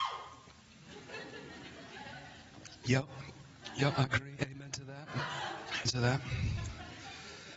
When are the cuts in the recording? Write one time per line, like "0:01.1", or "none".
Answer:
0:05.9